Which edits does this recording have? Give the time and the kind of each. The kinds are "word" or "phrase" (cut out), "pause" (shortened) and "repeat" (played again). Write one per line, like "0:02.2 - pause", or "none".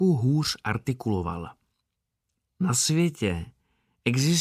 none